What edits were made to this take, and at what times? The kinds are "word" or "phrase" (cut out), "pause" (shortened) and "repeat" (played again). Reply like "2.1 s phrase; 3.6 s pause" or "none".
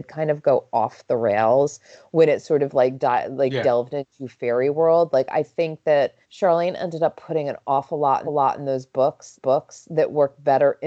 6.2 s pause; 8.3 s repeat; 9.4 s repeat